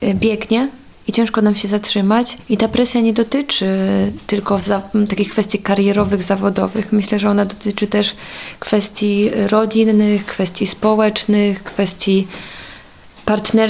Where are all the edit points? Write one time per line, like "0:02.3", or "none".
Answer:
none